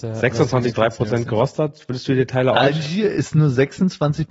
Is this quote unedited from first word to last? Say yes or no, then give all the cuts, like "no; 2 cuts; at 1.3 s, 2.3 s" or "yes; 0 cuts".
yes; 0 cuts